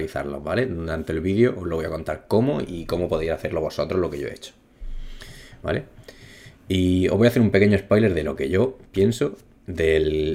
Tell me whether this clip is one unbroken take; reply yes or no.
yes